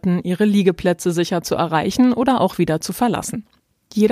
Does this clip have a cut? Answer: no; 0 cuts

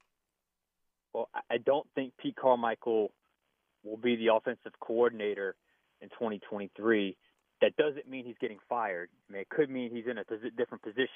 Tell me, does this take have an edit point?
no; 0 cuts

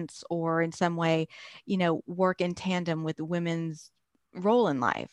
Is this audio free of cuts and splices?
yes; 0 cuts

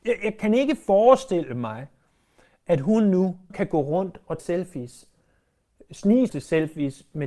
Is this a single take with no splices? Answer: no; 3 cuts; at 3.5 s, 4.4 s, 6.3 s

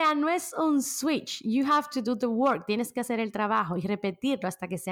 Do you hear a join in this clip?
no; 0 cuts

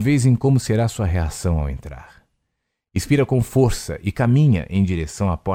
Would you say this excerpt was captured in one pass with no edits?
yes; 0 cuts

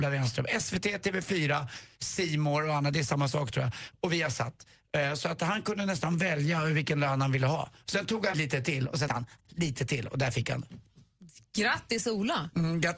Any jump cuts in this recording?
yes; 3 cuts; at 8.3 s, 9.1 s, 9.4 s

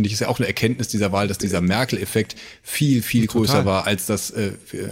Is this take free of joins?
yes; 0 cuts

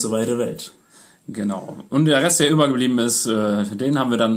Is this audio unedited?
yes; 0 cuts

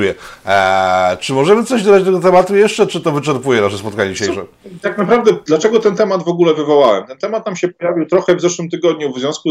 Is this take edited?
no; 0 cuts

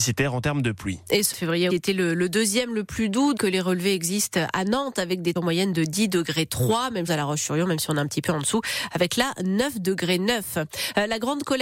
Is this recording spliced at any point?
yes; 5 cuts; at 1.3 s, 1.7 s, 3.4 s, 5.4 s, 7.1 s

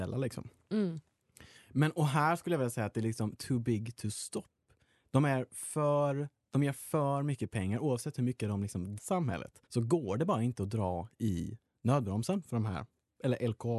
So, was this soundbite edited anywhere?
yes; 2 cuts; at 9.0 s, 9.7 s

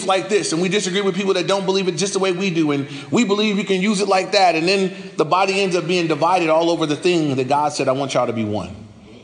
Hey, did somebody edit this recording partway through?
no; 0 cuts

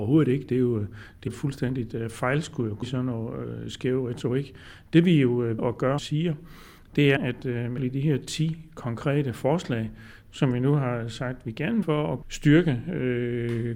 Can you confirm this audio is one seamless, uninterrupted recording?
no; 8 cuts; at 1.3 s, 2.8 s, 5.6 s, 6.0 s, 7.2 s, 7.8 s, 11.8 s, 12.2 s

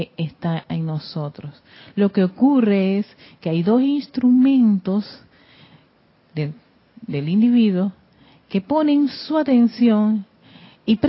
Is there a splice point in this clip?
no; 0 cuts

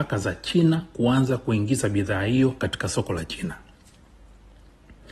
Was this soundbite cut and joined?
no; 0 cuts

